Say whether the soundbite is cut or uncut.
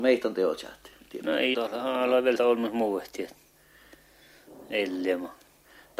cut